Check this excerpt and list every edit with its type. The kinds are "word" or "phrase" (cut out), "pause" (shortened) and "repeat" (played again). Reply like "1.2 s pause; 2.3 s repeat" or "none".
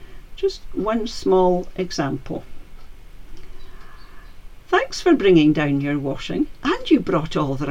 none